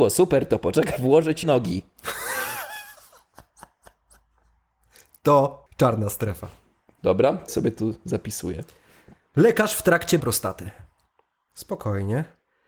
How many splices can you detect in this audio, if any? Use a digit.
5